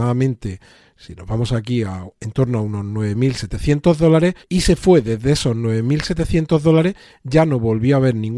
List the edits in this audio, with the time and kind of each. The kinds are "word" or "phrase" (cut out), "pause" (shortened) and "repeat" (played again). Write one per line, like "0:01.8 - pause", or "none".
0:04.4 - pause